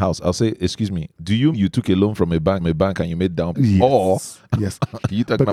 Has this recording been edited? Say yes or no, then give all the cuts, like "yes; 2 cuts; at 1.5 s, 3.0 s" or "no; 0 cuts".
yes; 3 cuts; at 1.5 s, 2.6 s, 3.5 s